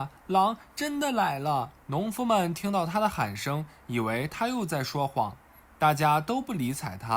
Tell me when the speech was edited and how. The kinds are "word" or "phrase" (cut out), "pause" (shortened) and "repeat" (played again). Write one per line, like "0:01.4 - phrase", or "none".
0:01.8 - pause

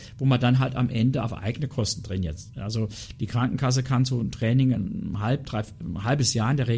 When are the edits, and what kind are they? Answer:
none

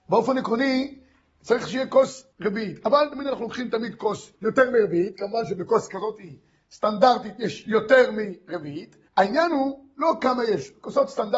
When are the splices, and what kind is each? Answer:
0:02.3 - pause
0:04.3 - pause
0:09.1 - pause

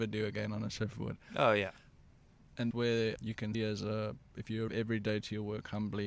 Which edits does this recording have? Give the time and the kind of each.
0:02.7 - word
0:03.2 - word
0:03.5 - word
0:04.7 - word

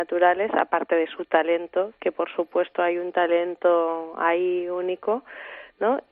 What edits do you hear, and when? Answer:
none

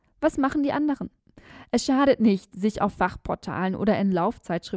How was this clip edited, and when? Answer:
none

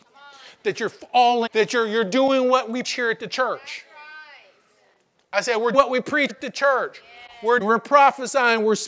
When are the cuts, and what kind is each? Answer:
0:01.5 - word
0:02.8 - word
0:05.7 - word
0:06.3 - word
0:07.6 - word

